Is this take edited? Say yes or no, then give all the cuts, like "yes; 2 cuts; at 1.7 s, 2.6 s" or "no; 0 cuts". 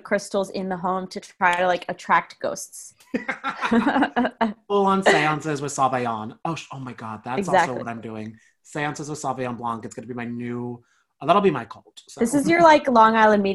no; 0 cuts